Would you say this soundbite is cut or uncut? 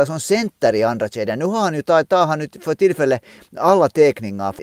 uncut